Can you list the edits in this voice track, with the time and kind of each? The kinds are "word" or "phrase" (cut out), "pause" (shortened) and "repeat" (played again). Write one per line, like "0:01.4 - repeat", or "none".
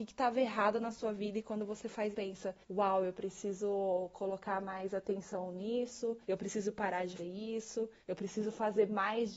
0:02.1 - phrase
0:02.6 - pause
0:06.2 - pause
0:07.2 - word
0:08.0 - pause